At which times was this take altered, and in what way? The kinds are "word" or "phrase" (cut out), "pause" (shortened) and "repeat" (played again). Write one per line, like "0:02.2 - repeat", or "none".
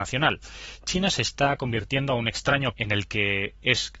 0:02.7 - word